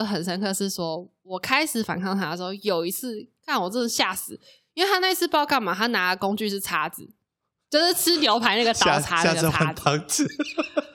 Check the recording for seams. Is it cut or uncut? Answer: uncut